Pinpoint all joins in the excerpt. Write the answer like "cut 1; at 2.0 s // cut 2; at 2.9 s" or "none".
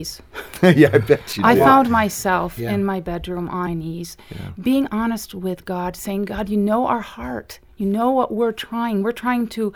cut 1; at 3.7 s